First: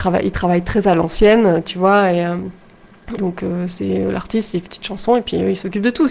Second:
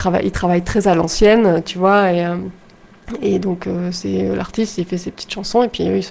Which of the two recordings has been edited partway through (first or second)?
first